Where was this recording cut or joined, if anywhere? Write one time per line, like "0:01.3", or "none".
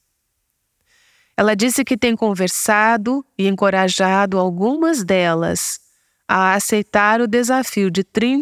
none